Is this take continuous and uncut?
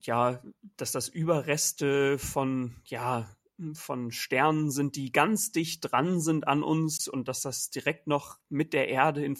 yes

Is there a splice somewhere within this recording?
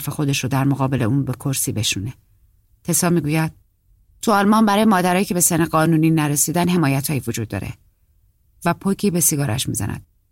no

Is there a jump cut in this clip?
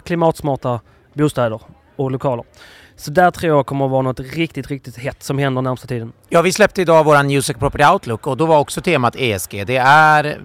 no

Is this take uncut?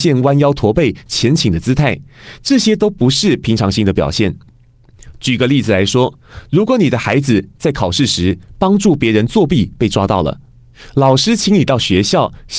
yes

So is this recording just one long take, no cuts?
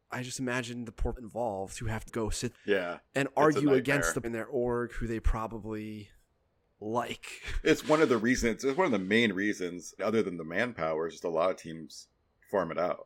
no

